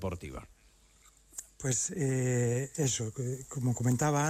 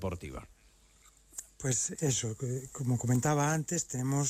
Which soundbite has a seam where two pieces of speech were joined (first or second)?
second